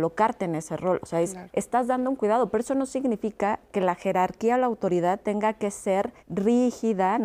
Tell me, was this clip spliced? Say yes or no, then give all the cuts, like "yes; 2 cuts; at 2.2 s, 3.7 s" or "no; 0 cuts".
yes; 1 cut; at 6.2 s